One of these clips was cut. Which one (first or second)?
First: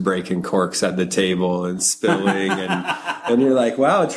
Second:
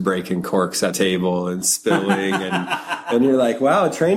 second